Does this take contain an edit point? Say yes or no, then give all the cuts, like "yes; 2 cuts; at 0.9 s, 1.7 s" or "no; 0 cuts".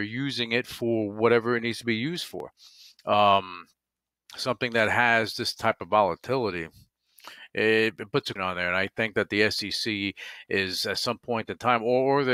yes; 1 cut; at 8.4 s